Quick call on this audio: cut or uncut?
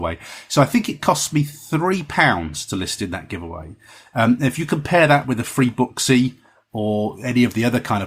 uncut